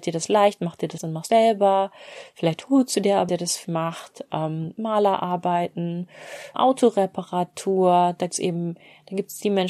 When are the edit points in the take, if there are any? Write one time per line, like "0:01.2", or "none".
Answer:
0:01.0
0:01.3
0:03.3
0:03.6
0:06.5
0:08.3